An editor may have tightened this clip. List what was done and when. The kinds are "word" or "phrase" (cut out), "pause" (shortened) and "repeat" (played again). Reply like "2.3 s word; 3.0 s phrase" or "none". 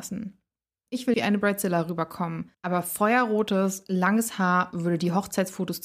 1.1 s word; 2.5 s pause